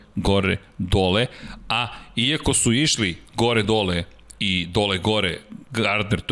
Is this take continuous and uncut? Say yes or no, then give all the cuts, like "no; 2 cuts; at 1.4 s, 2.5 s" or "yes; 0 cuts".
yes; 0 cuts